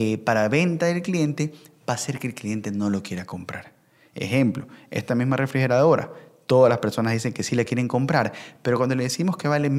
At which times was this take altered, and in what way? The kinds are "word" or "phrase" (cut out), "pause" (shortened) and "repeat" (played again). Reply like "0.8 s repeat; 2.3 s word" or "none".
none